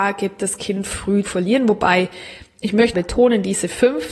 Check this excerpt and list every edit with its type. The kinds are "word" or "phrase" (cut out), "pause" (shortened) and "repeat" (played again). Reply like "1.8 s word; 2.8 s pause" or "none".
1.2 s word; 2.9 s word